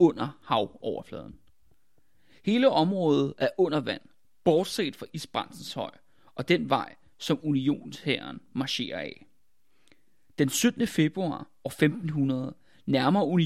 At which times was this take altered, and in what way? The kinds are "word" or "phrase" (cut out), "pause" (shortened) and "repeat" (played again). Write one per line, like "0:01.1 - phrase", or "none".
none